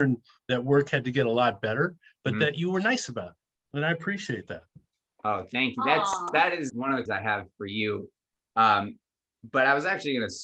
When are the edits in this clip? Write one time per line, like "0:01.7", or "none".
0:06.7
0:07.1